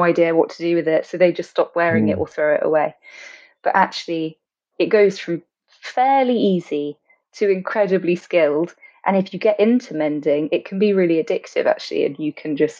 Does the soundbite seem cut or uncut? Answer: uncut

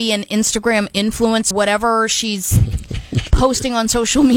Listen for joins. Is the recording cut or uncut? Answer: cut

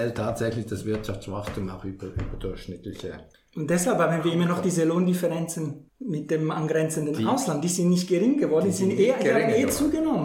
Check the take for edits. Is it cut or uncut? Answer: cut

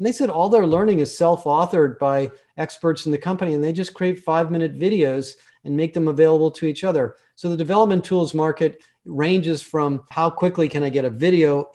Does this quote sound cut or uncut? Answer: uncut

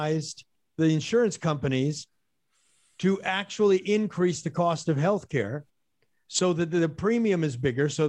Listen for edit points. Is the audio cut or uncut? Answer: uncut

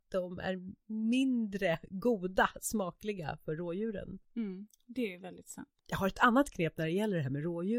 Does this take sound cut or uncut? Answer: cut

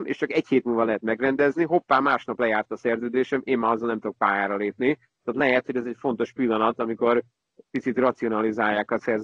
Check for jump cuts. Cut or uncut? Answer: uncut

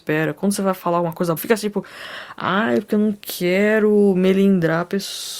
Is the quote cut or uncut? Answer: cut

